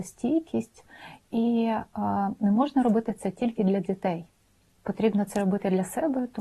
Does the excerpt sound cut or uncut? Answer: uncut